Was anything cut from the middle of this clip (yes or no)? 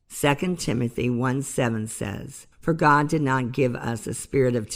yes